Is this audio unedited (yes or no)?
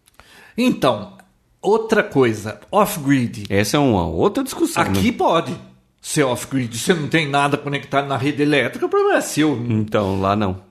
yes